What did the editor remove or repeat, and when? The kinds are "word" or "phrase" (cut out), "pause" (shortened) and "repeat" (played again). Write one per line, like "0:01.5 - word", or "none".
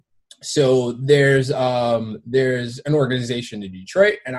none